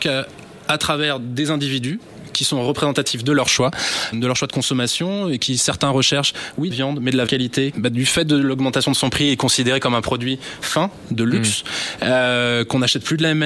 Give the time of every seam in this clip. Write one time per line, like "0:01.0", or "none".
0:04.1
0:06.7
0:07.3
0:07.7

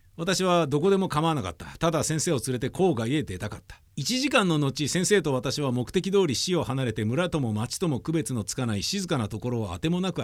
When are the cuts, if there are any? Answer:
0:03.9

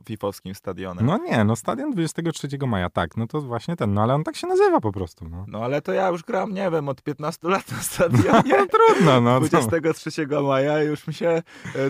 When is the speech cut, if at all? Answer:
none

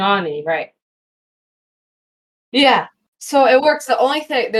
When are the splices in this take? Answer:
none

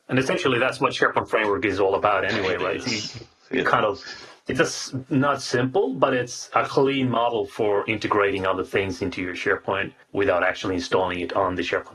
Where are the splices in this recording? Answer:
0:10.0

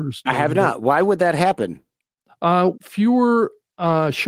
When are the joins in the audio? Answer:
0:02.7

